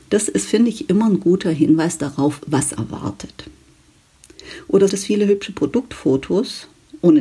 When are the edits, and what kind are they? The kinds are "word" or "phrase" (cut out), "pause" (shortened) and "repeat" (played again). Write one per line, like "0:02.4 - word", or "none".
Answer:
0:02.8 - word
0:04.9 - word